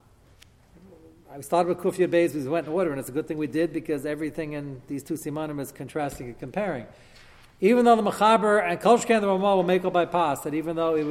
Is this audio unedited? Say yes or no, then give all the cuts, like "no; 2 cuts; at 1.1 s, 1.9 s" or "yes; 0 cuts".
yes; 0 cuts